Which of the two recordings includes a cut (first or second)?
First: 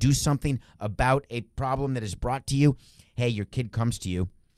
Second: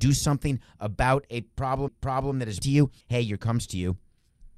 second